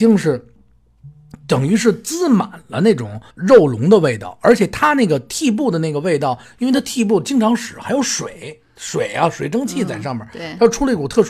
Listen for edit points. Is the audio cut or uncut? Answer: cut